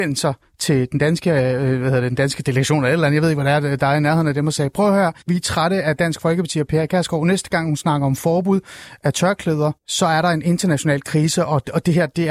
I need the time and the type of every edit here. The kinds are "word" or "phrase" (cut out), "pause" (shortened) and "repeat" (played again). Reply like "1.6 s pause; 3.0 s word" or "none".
5.2 s pause; 9.8 s pause

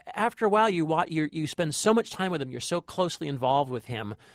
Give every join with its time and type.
none

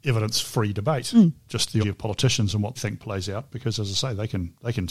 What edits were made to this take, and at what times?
1.8 s word; 2.8 s word

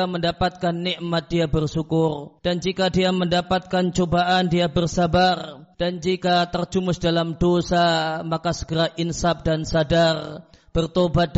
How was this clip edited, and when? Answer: 2.4 s pause; 5.7 s pause

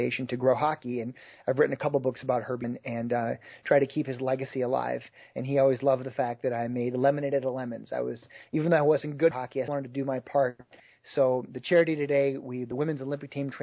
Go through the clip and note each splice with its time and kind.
2.6 s word; 9.3 s phrase; 9.7 s word

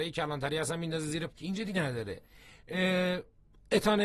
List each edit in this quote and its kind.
1.3 s word; 1.7 s word

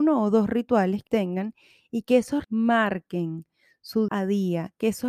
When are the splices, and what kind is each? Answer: 1.1 s word; 2.4 s word; 4.1 s word

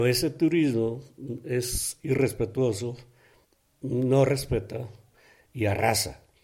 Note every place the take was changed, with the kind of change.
3.4 s pause

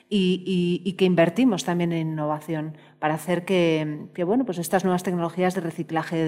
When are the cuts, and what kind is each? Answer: none

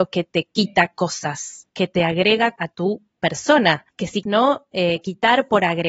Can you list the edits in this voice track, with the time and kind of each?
1.7 s word; 2.6 s word; 4.2 s word

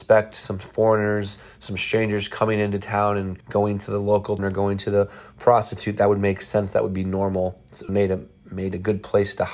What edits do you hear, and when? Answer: 3.4 s pause; 4.4 s word; 7.9 s word

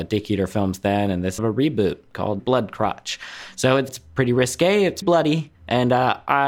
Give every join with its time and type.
1.4 s phrase; 2.4 s phrase; 3.9 s word; 5.0 s word; 5.6 s pause

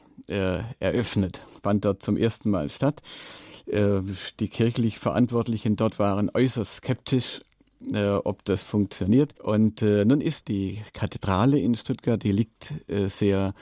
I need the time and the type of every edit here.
9.4 s pause; 10.4 s word

